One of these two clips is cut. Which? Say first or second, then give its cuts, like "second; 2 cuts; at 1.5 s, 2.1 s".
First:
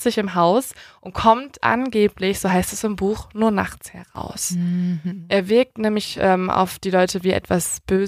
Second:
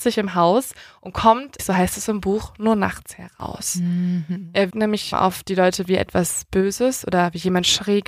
second; 3 cuts; at 1.6 s, 4.7 s, 5.1 s